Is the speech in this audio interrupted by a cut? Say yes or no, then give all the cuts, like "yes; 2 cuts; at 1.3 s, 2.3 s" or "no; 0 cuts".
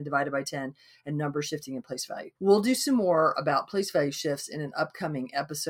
yes; 1 cut; at 2.4 s